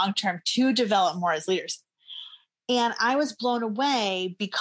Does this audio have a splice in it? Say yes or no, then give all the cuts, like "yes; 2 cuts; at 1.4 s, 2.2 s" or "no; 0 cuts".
no; 0 cuts